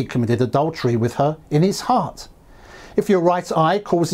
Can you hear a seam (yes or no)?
no